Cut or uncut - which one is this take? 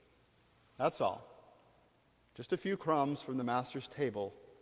uncut